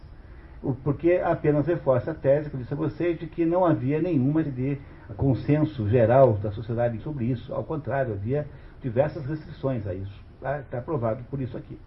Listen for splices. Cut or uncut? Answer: cut